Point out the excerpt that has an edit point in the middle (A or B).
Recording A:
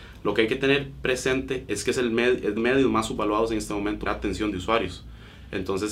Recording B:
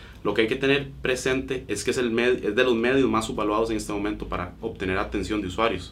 A